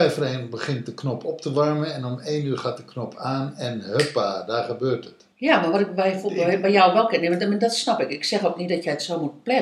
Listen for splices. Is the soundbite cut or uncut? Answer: cut